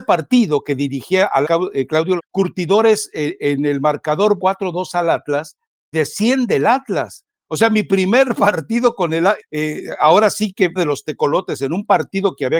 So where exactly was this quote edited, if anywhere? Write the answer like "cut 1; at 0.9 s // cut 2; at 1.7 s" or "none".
cut 1; at 1.4 s // cut 2; at 2.2 s // cut 3; at 4.4 s // cut 4; at 5.9 s // cut 5; at 9.4 s // cut 6; at 10.8 s